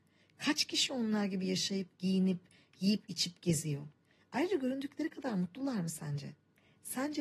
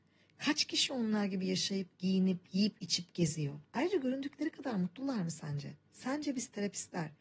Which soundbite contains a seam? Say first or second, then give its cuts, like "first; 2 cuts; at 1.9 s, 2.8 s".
second; 3 cuts; at 2.4 s, 3.7 s, 5.8 s